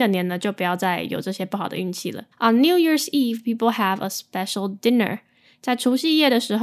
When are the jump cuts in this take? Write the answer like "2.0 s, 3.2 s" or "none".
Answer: 2.3 s